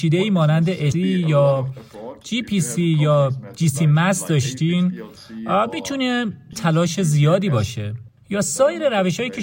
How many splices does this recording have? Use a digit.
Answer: 2